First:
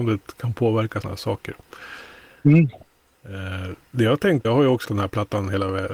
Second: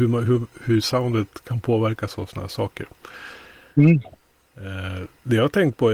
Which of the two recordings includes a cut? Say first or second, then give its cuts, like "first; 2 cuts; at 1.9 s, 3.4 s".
first; 3 cuts; at 1.0 s, 4.4 s, 4.8 s